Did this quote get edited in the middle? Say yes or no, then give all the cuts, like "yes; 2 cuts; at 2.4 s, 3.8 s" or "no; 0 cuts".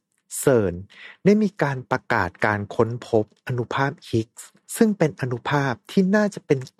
yes; 1 cut; at 4.6 s